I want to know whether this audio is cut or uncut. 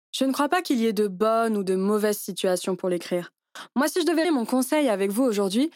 cut